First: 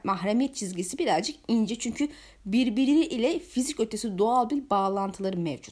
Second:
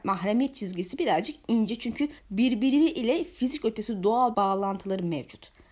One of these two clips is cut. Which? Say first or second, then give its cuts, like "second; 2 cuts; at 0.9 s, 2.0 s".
second; 2 cuts; at 2.2 s, 4.3 s